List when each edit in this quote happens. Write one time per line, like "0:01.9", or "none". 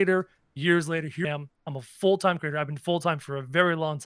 0:01.2
0:02.4